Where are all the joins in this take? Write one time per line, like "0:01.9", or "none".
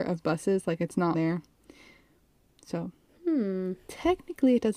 0:01.1